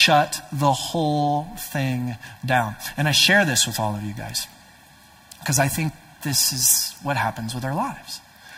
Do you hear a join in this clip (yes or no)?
no